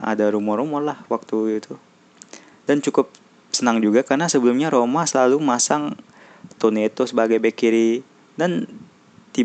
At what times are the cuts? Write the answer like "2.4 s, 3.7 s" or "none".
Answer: none